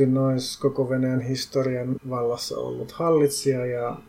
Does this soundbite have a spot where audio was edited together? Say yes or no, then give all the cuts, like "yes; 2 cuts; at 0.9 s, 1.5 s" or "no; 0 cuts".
yes; 1 cut; at 2.0 s